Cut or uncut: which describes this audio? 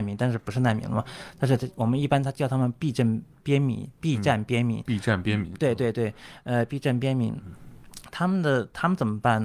uncut